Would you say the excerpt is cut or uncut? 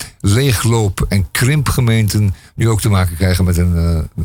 uncut